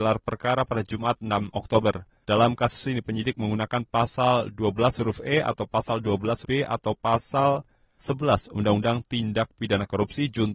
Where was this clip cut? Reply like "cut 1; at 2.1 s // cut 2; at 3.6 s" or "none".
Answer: cut 1; at 2.2 s // cut 2; at 6.4 s

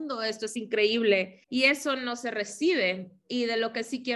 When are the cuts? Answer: cut 1; at 1.4 s

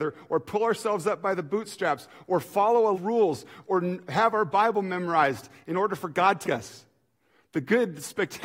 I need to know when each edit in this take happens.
cut 1; at 2.9 s // cut 2; at 6.4 s

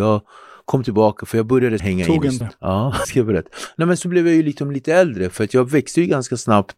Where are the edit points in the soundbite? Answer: cut 1; at 1.8 s // cut 2; at 2.4 s // cut 3; at 3.0 s // cut 4; at 4.0 s

